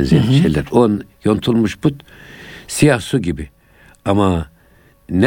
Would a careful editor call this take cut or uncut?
uncut